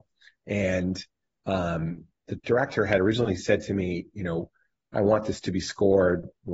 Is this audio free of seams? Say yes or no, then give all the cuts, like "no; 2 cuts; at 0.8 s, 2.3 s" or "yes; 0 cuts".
yes; 0 cuts